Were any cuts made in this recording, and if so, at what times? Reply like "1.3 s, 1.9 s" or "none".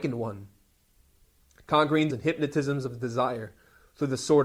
2.1 s